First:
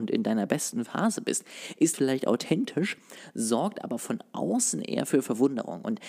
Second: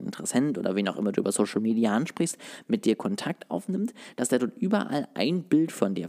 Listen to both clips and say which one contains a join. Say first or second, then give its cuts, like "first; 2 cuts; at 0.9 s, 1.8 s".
first; 1 cut; at 1.9 s